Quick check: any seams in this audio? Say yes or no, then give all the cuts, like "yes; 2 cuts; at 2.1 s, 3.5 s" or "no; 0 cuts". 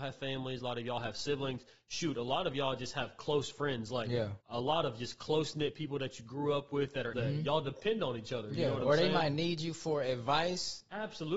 yes; 2 cuts; at 4.4 s, 7.1 s